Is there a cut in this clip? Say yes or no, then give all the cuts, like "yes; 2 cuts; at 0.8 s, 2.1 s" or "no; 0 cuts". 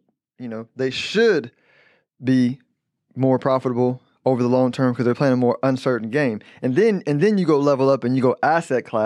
no; 0 cuts